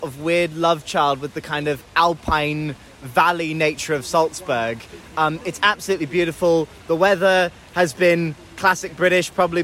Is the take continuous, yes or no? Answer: yes